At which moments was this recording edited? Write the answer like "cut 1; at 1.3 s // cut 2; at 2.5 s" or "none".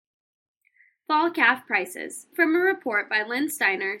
cut 1; at 2.3 s